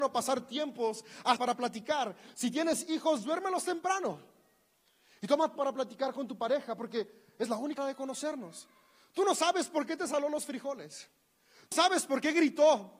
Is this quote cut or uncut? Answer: cut